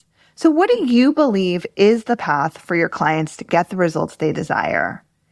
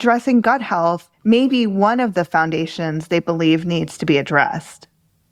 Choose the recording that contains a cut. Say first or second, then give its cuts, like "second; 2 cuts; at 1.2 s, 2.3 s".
second; 1 cut; at 1.1 s